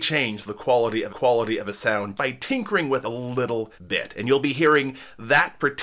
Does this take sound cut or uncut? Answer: cut